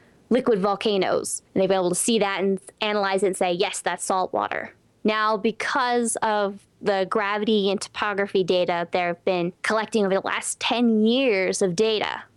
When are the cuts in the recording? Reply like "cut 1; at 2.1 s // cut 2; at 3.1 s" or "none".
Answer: cut 1; at 1.5 s // cut 2; at 4.9 s // cut 3; at 9.6 s